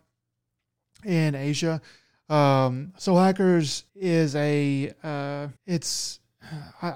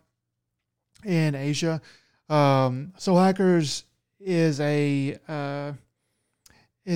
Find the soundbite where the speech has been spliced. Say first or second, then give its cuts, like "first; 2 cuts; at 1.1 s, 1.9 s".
first; 2 cuts; at 3.9 s, 5.6 s